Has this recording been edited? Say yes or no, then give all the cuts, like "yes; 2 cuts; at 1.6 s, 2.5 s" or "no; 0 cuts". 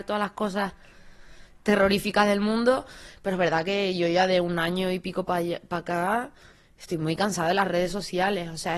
no; 0 cuts